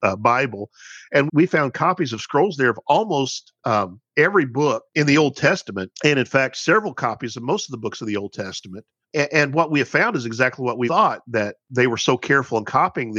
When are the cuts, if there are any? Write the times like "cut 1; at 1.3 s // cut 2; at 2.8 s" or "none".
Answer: cut 1; at 1.3 s // cut 2; at 3.6 s // cut 3; at 4.9 s // cut 4; at 5.9 s // cut 5; at 9.0 s // cut 6; at 10.9 s